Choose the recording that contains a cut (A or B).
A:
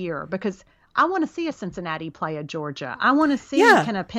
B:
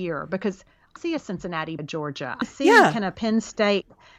B